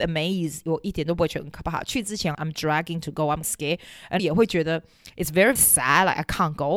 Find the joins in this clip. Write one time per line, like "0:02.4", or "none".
0:02.3
0:03.4
0:04.2
0:05.6